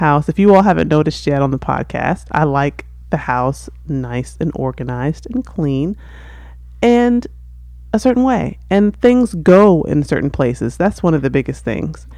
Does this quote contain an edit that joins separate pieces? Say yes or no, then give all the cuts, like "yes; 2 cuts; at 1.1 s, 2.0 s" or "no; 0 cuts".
no; 0 cuts